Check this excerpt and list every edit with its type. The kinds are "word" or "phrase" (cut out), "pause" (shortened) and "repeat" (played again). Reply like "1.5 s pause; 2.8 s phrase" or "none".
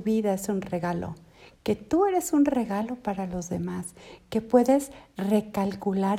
none